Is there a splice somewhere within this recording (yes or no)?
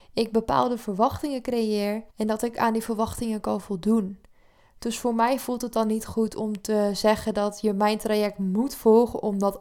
yes